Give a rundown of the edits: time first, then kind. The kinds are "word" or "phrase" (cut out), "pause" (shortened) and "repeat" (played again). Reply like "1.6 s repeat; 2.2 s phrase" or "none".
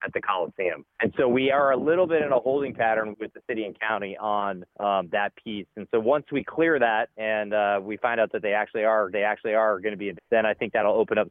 0.9 s pause; 3.1 s word; 4.7 s pause; 7.1 s pause; 9.1 s repeat; 10.2 s phrase